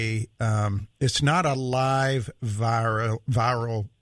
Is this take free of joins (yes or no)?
yes